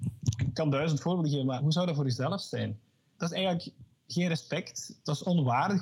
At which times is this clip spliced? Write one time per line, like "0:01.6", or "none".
none

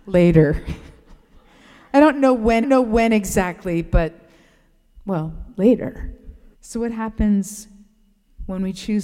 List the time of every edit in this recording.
0:02.6
0:06.5

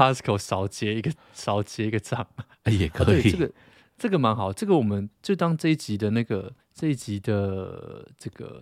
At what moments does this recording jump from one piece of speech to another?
0:06.6

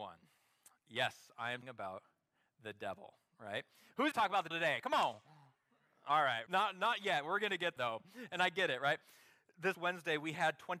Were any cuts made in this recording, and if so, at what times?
0:01.6
0:04.1
0:04.5
0:06.5
0:07.8
0:09.7

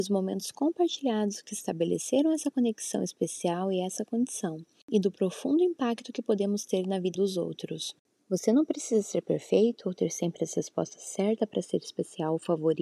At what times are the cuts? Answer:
0:07.1

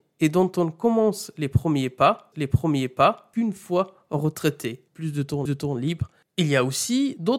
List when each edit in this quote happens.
0:02.3
0:04.9
0:05.5

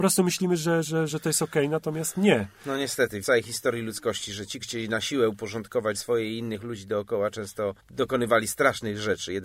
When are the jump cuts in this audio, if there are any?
0:01.1
0:03.2
0:04.6
0:05.9
0:07.8

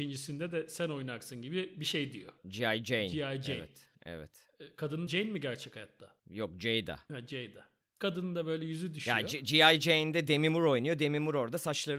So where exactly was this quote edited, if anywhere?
0:02.4
0:03.9
0:05.1
0:06.2

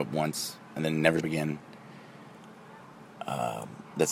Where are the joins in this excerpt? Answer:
0:01.2

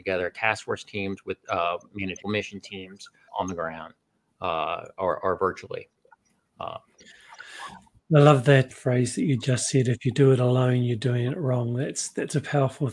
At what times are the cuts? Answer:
0:02.2
0:03.3
0:08.7

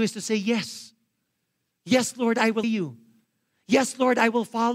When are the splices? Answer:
0:02.6

